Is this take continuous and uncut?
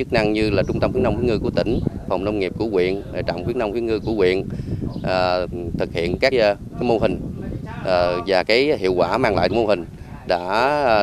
no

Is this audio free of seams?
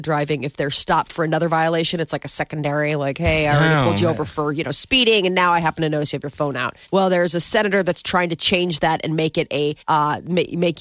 no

